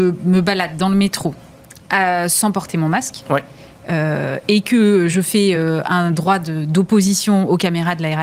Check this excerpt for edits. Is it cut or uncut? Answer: uncut